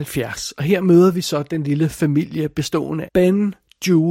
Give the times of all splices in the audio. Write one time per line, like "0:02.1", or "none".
0:03.1

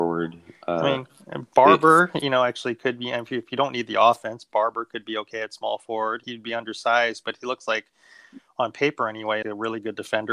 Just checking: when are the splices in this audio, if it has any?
0:06.2
0:09.4

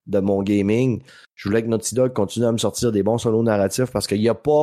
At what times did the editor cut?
none

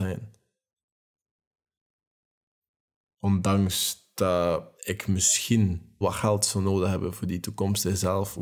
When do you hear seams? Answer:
0:04.8
0:06.0

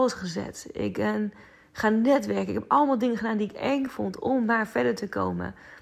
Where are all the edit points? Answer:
none

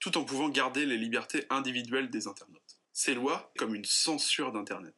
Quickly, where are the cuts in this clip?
0:02.8
0:03.6

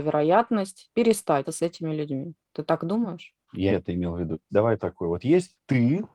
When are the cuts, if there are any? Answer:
0:01.4
0:03.7
0:04.8

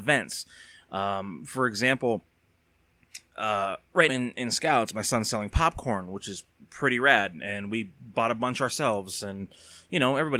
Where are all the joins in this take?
0:04.1

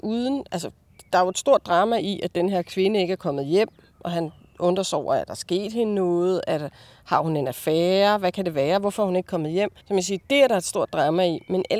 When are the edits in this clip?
0:09.8

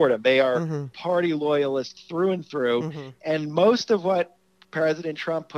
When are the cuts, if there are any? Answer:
none

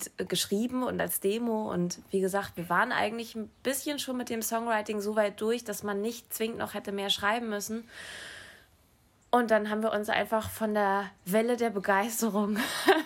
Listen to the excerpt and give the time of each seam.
none

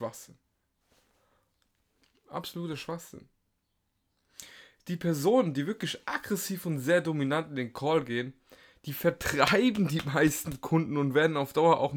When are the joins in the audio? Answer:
none

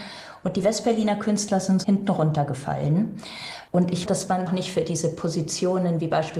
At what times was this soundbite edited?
0:01.8
0:04.1
0:04.5

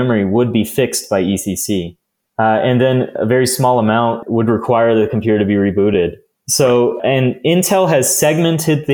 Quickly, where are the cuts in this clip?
none

